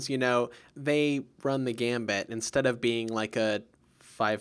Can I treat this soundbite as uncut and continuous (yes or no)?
yes